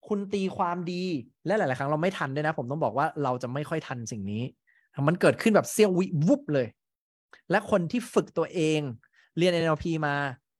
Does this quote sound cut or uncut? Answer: uncut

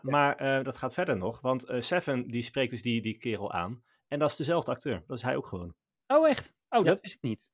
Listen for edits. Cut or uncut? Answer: uncut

